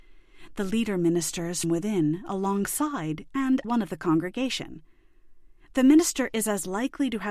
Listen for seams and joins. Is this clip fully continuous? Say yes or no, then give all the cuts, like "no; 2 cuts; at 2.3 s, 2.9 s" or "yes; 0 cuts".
no; 2 cuts; at 1.6 s, 3.6 s